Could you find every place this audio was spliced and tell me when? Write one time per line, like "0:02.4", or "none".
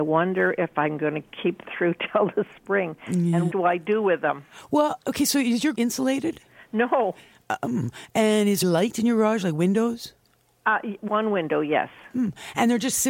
0:01.6
0:03.5
0:05.7
0:08.6
0:11.1